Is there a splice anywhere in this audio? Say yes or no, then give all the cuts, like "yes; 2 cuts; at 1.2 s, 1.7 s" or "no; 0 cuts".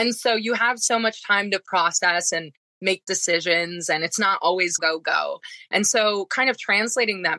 yes; 1 cut; at 4.8 s